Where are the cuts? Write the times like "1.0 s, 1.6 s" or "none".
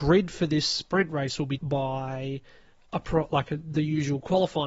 1.6 s